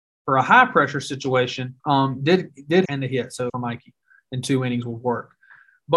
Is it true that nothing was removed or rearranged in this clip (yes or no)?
no